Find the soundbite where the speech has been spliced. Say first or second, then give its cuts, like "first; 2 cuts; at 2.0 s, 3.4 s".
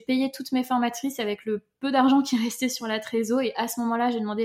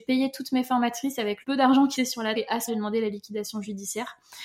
second; 4 cuts; at 1.4 s, 2.0 s, 2.4 s, 2.7 s